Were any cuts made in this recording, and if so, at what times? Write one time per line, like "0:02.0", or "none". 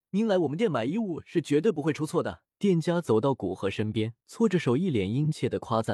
0:02.5
0:04.2